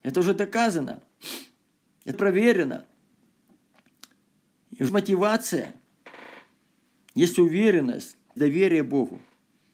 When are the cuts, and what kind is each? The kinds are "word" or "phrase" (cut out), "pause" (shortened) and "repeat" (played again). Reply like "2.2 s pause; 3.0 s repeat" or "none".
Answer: 2.1 s word; 4.9 s word; 8.4 s word